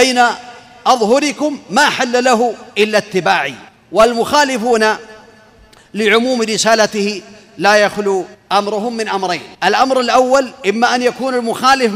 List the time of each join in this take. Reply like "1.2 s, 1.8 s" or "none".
2.7 s, 3.7 s, 8.3 s, 9.5 s